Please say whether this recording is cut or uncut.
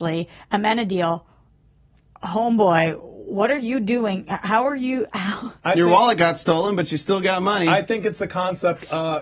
uncut